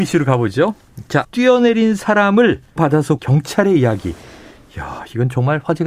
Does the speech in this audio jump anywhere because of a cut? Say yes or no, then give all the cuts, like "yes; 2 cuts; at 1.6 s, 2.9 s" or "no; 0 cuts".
yes; 3 cuts; at 1.2 s, 2.8 s, 3.2 s